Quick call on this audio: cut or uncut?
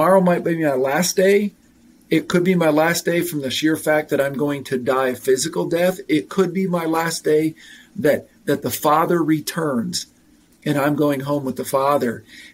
uncut